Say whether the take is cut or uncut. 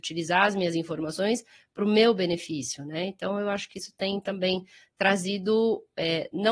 uncut